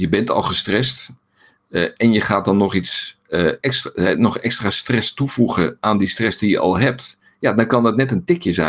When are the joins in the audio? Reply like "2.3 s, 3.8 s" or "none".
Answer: none